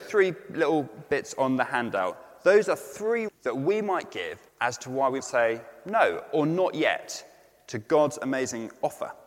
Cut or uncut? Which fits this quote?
cut